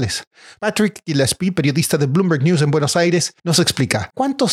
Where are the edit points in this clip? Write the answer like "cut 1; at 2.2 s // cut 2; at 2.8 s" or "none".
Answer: cut 1; at 3.4 s